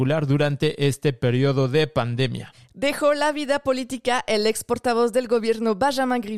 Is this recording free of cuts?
yes; 0 cuts

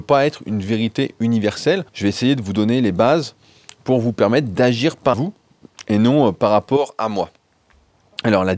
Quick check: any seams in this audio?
yes; 2 cuts; at 1.9 s, 5.1 s

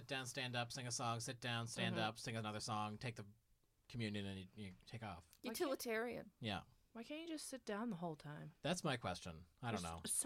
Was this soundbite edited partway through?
no; 0 cuts

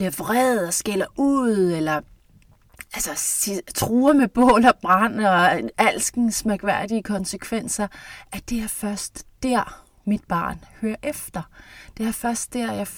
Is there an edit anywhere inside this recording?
no; 0 cuts

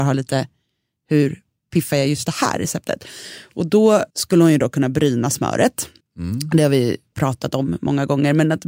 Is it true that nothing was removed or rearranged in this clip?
no; 2 cuts; at 4.1 s, 6.0 s

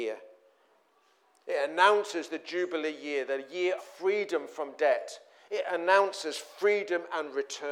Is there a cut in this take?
yes; 1 cut; at 3.8 s

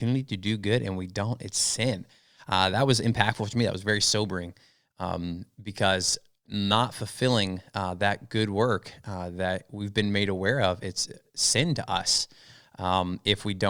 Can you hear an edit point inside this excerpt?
no; 0 cuts

